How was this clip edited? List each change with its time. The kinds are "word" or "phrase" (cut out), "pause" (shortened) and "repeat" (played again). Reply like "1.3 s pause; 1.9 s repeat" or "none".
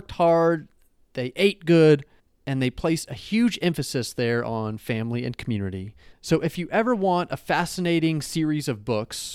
2.2 s pause; 6.1 s pause